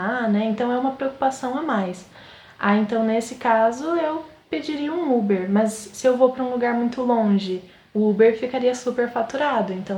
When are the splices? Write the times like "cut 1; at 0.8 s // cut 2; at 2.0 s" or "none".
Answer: none